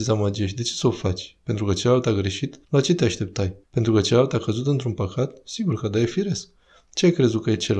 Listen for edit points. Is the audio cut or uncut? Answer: cut